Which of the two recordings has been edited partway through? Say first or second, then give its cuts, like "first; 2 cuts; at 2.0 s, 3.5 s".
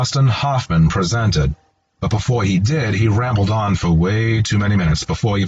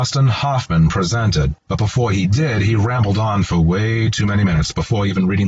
second; 1 cut; at 1.6 s